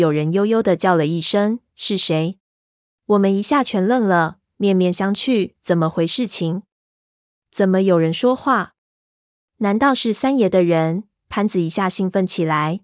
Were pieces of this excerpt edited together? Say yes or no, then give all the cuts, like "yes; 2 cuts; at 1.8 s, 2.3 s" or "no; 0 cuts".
yes; 2 cuts; at 2.4 s, 5.6 s